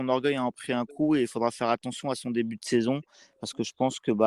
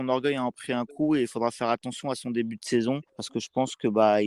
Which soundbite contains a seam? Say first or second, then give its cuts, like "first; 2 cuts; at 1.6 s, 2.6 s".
second; 1 cut; at 3.1 s